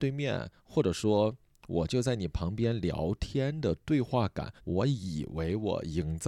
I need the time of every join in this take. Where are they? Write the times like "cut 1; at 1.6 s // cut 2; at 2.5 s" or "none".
cut 1; at 4.6 s